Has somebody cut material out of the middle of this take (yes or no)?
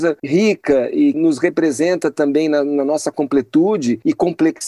yes